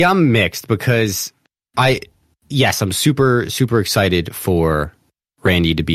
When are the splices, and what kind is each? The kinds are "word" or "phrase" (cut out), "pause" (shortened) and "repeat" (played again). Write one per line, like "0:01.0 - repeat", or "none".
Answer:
none